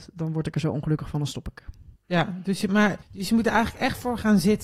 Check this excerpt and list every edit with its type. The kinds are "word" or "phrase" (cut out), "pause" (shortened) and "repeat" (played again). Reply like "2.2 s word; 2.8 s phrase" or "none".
2.0 s pause; 3.0 s pause